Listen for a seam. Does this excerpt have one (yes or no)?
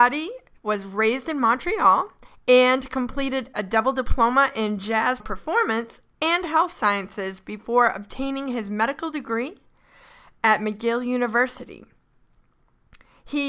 yes